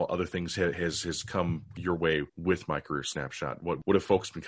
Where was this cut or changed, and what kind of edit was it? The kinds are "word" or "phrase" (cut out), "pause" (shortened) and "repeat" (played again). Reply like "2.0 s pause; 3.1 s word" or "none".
2.3 s pause